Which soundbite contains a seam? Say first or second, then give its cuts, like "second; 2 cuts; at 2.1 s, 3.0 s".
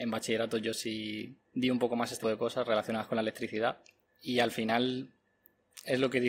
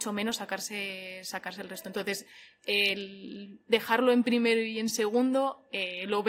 first; 1 cut; at 2.2 s